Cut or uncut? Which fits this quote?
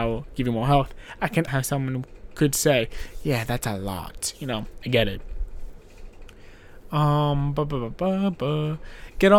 cut